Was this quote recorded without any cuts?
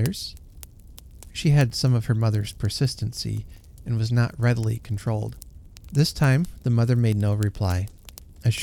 yes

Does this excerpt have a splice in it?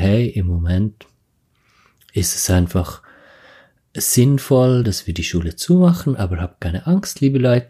no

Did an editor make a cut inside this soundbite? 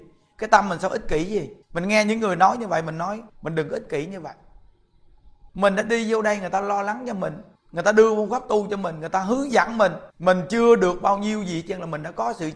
yes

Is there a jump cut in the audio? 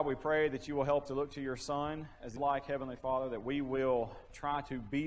yes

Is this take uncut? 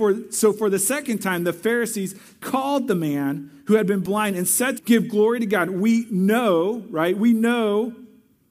no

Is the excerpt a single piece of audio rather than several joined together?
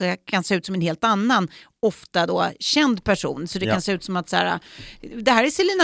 yes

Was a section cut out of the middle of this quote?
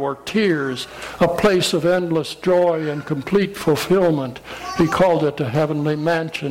no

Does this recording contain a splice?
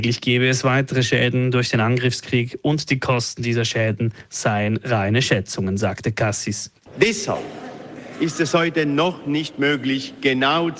no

